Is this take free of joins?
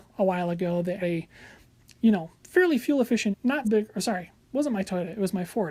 no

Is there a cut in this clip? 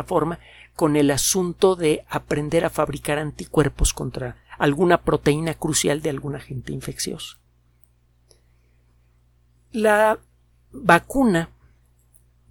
no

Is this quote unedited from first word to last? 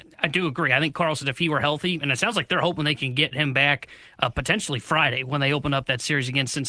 yes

